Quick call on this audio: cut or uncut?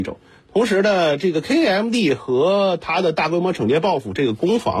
uncut